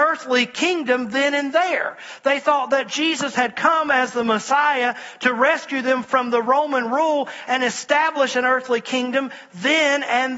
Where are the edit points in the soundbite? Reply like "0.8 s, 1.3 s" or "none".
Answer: none